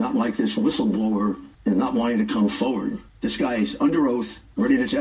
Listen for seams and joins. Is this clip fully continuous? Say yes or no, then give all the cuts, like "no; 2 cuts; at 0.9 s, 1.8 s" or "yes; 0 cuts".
no; 2 cuts; at 1.5 s, 3.1 s